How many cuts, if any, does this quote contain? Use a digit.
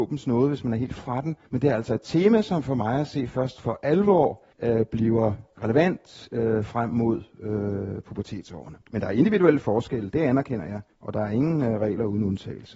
5